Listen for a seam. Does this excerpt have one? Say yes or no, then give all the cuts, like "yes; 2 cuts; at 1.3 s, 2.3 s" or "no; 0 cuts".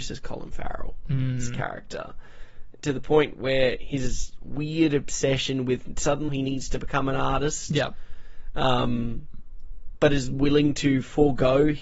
yes; 1 cut; at 6.3 s